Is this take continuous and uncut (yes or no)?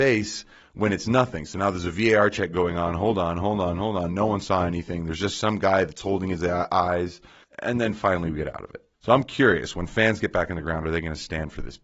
no